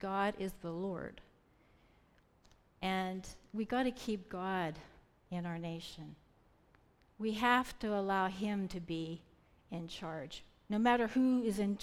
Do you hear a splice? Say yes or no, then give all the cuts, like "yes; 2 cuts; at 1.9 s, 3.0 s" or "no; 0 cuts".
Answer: no; 0 cuts